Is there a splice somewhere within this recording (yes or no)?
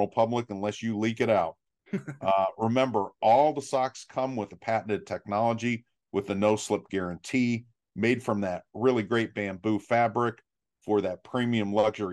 no